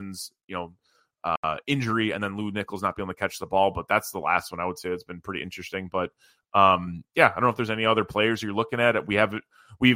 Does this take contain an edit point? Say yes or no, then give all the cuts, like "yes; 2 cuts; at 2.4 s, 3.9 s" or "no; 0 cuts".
no; 0 cuts